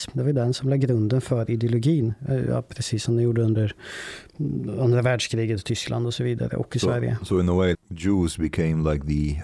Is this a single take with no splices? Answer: no; 1 cut; at 7.7 s

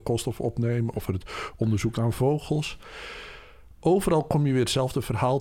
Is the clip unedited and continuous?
no; 1 cut; at 1.1 s

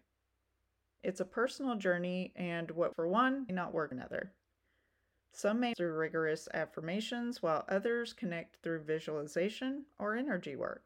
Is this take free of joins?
no; 4 cuts; at 2.9 s, 3.5 s, 3.9 s, 5.7 s

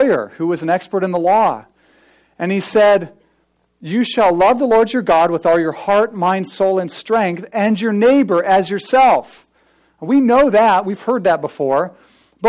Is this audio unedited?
yes; 0 cuts

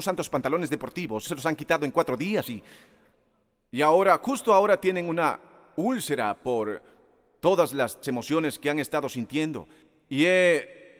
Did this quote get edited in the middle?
yes; 2 cuts; at 1.3 s, 8.0 s

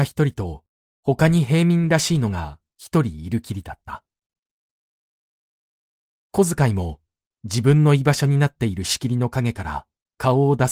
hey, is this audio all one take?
yes; 0 cuts

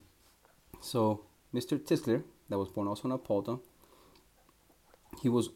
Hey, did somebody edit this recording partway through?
no; 0 cuts

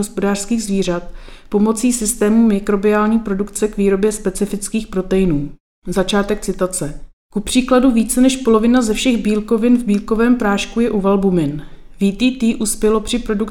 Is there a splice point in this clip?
no; 0 cuts

